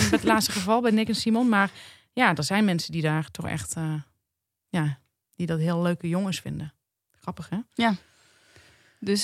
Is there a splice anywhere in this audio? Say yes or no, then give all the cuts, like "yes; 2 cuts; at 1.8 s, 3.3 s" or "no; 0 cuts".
no; 0 cuts